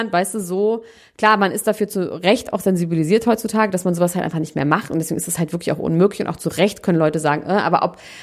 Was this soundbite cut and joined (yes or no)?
no